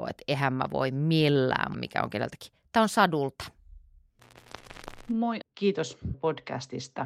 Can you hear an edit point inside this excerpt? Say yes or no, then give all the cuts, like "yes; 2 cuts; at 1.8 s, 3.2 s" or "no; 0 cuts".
yes; 3 cuts; at 1.7 s, 5.4 s, 6.1 s